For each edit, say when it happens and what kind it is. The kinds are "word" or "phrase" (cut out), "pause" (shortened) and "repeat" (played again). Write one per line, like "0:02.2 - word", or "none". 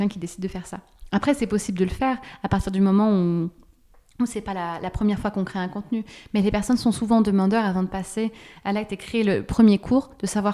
none